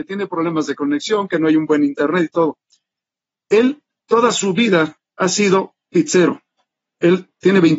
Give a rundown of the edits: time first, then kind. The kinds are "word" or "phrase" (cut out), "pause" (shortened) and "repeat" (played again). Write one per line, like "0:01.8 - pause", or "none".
none